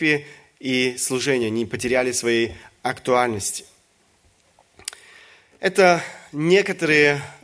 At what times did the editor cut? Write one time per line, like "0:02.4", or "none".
none